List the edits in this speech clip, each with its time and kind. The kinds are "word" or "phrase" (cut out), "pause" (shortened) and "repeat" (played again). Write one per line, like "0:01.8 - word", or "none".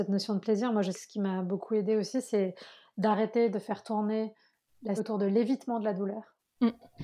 0:00.9 - word
0:05.0 - word